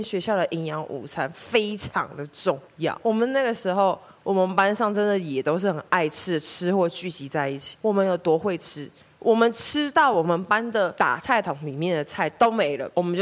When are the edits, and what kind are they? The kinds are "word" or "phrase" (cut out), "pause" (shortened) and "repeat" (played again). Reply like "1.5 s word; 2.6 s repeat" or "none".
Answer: none